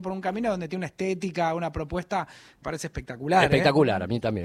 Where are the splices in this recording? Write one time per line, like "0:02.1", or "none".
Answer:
0:02.6